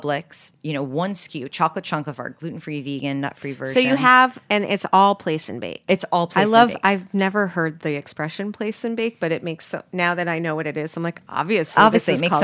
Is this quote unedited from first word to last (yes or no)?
yes